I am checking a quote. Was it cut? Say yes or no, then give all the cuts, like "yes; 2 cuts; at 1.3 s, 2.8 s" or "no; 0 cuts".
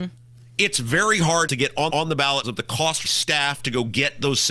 yes; 4 cuts; at 1.5 s, 1.9 s, 2.4 s, 3.0 s